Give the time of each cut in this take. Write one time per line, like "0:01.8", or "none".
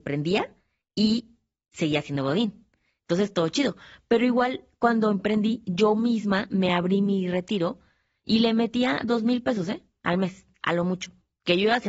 none

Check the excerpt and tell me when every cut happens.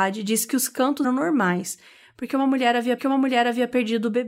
0:01.0
0:03.0

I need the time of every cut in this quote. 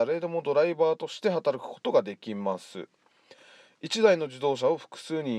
none

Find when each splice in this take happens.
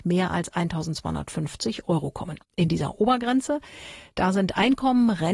0:02.4

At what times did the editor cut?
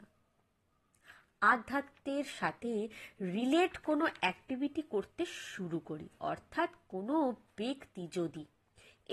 none

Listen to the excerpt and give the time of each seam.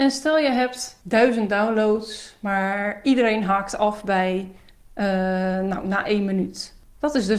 none

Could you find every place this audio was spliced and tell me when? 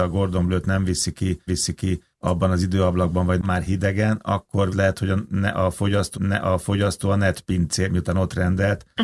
0:01.5
0:03.4
0:04.7
0:06.1

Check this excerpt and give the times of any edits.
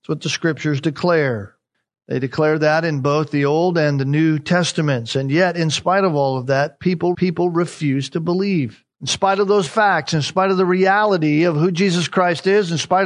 0:01.7
0:07.1
0:08.9
0:09.7

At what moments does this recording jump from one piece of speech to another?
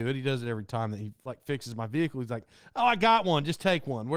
none

